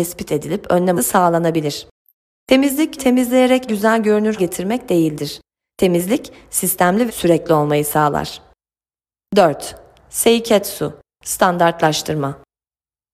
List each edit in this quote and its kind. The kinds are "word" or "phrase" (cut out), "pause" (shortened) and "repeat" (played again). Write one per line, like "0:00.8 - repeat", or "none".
0:01.0 - word
0:03.0 - word
0:03.7 - word
0:04.4 - word
0:07.1 - word